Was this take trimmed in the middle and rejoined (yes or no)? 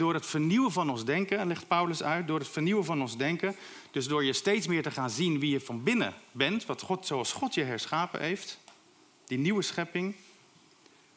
no